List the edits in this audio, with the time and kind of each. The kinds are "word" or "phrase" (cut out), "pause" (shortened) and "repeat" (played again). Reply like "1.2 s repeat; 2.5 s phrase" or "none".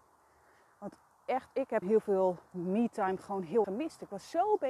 1.8 s word; 3.6 s word